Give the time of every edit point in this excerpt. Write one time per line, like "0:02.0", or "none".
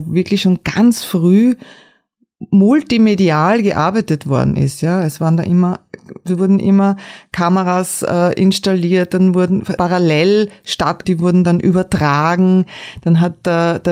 0:09.8
0:11.0